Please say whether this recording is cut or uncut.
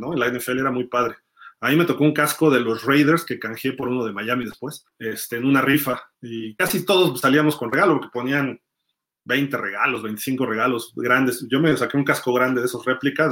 cut